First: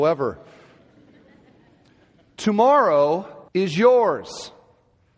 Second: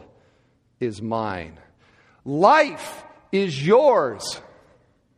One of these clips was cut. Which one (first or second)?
first